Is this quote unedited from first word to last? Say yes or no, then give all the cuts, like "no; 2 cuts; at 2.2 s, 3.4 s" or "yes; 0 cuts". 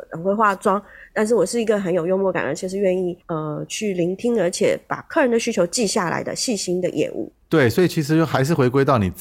no; 2 cuts; at 3.2 s, 7.4 s